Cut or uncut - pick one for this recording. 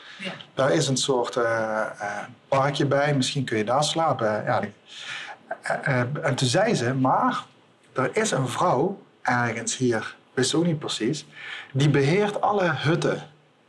cut